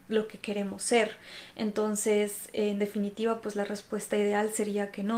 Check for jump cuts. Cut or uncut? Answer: uncut